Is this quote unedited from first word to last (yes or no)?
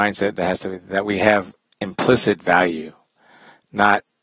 yes